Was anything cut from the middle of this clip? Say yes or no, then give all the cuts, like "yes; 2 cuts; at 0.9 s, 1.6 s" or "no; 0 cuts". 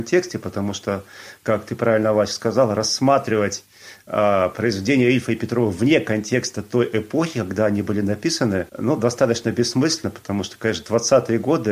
yes; 1 cut; at 8.7 s